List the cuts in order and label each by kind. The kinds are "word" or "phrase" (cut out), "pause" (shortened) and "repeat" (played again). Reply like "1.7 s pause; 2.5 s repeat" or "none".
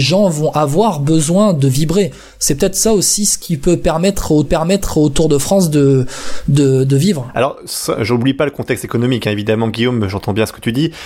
4.4 s repeat